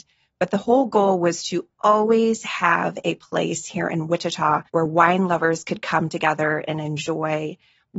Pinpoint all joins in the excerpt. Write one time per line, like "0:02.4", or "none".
0:04.7